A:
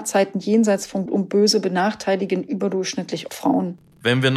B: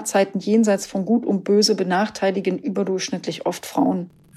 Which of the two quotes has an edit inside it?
A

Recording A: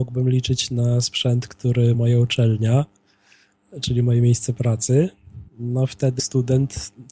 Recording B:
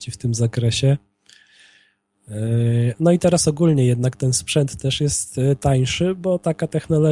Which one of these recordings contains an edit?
A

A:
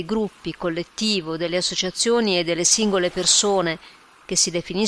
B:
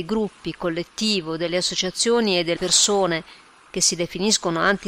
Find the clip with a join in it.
B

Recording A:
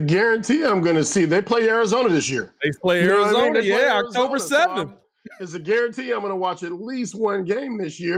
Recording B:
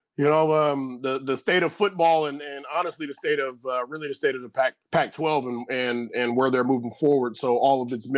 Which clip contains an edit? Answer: B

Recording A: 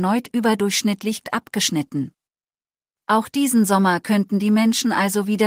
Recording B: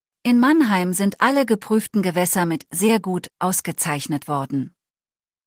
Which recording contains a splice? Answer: A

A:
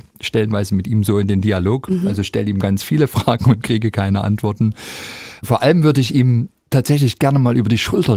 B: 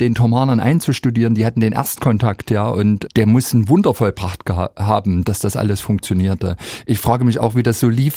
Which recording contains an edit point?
B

